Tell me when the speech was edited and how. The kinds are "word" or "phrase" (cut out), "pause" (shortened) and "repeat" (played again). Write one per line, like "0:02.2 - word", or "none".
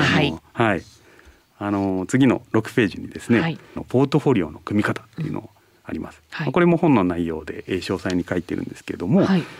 0:03.8 - word